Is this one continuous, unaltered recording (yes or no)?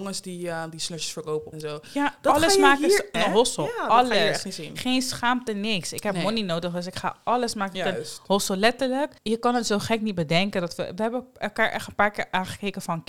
no